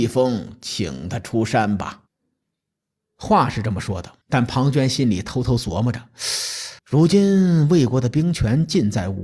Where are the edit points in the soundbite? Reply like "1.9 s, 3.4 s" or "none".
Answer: 2.1 s, 4.2 s, 6.8 s